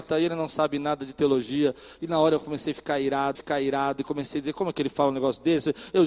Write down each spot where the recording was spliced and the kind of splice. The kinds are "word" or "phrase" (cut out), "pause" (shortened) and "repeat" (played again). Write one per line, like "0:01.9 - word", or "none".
0:03.3 - repeat